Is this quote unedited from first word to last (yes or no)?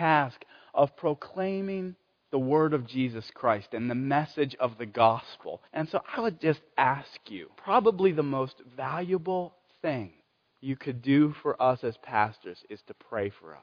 no